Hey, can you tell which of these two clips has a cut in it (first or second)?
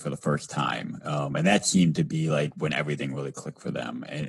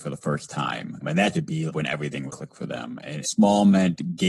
second